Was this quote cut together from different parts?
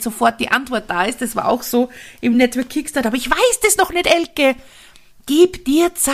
no; 0 cuts

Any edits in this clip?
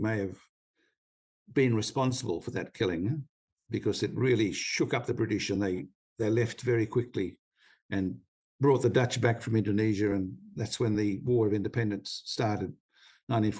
no; 0 cuts

